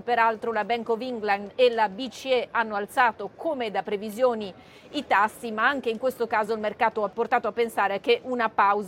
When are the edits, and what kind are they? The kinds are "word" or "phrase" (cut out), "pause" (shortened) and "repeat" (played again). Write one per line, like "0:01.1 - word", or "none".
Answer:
none